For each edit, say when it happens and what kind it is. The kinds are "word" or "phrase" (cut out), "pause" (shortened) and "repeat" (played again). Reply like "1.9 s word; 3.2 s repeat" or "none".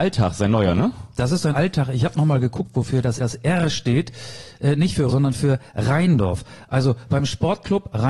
1.5 s phrase; 3.2 s repeat; 5.1 s word